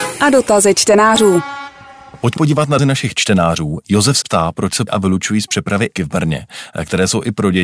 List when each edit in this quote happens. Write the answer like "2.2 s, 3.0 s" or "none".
2.4 s, 2.8 s, 4.2 s, 4.9 s, 6.0 s

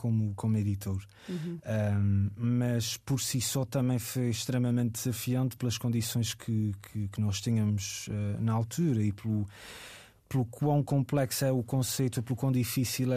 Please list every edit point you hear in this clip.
none

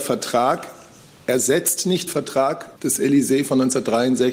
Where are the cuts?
2.1 s, 2.8 s

